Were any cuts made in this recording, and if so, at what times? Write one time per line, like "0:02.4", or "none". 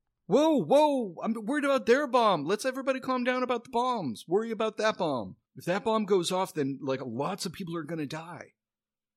0:05.4

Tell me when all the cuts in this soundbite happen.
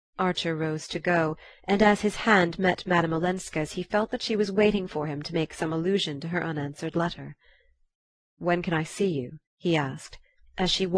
0:09.5

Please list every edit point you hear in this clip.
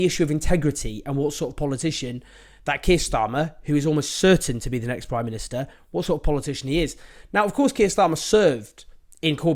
none

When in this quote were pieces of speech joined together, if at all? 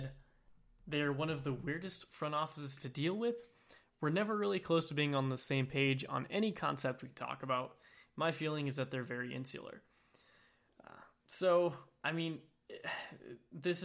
none

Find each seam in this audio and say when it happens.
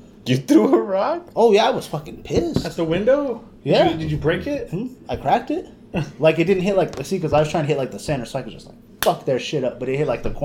none

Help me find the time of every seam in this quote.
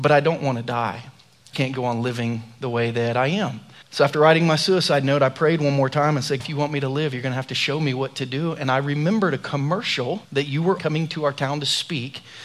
0:01.5
0:03.8
0:06.4
0:10.2
0:10.8

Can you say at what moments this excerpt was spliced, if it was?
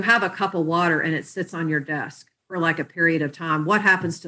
none

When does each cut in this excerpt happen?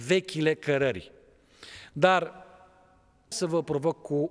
0:03.3

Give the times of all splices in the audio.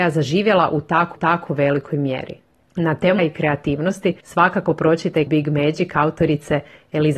0:01.1
0:02.4
0:03.2
0:04.2
0:05.3

